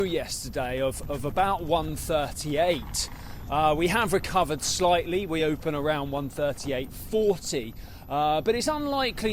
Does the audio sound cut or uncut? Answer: uncut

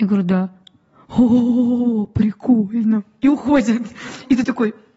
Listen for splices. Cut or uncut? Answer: uncut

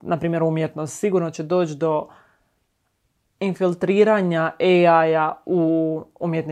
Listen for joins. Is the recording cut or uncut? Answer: uncut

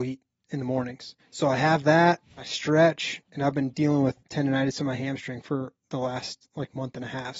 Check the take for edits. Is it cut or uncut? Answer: cut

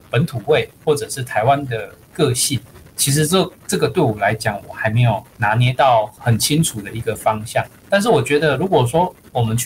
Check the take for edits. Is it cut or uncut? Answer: cut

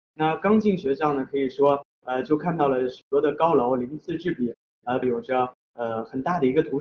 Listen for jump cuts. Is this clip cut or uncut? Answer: cut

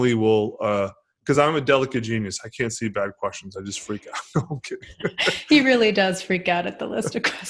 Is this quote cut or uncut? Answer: uncut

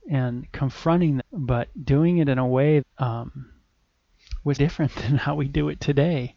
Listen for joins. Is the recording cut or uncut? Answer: cut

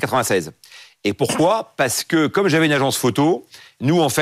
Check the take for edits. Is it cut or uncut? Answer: uncut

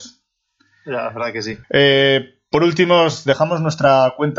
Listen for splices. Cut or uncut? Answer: cut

